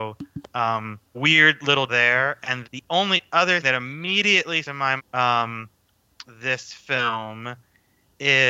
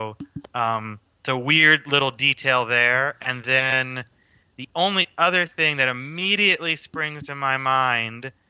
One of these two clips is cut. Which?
first; 7 cuts; at 1.1 s, 1.9 s, 2.6 s, 3.6 s, 4.6 s, 5.0 s, 6.2 s

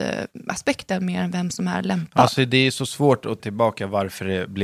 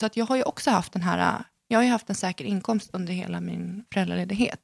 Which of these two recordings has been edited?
first; 1 cut; at 3.4 s

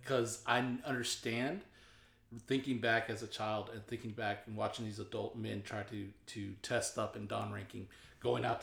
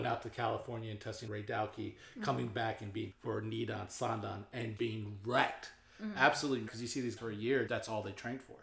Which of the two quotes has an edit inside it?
second; 6 cuts; at 1.3 s, 3.1 s, 4.8 s, 6.7 s, 7.2 s, 7.7 s

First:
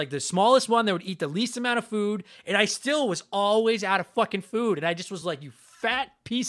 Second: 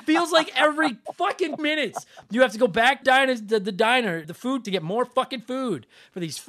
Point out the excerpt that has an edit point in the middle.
second; 4 cuts; at 1.6 s, 3.0 s, 4.2 s, 4.6 s

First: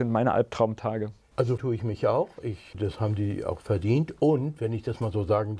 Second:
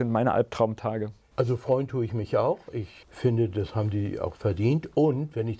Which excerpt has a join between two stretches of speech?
first; 2 cuts; at 1.6 s, 2.7 s

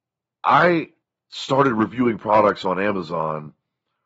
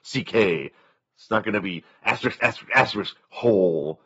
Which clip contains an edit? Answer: first; 1 cut; at 1.0 s

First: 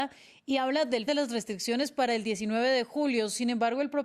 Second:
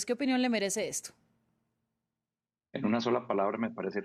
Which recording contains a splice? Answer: first; 1 cut; at 1.1 s

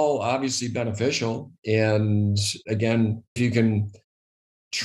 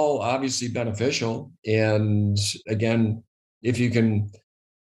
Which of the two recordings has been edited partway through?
first; 1 cut; at 3.4 s

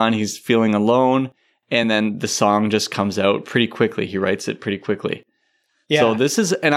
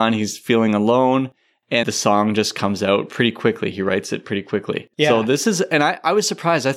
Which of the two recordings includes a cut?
second; 2 cuts; at 1.8 s, 4.9 s

